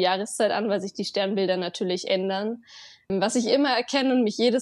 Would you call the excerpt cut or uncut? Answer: uncut